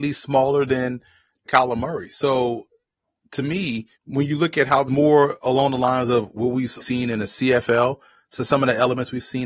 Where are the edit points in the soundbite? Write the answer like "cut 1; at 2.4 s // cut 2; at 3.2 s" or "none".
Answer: cut 1; at 1.5 s // cut 2; at 4.0 s // cut 3; at 4.9 s // cut 4; at 6.8 s